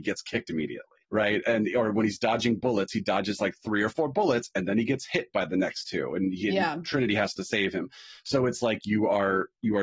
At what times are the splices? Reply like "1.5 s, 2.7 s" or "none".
1.0 s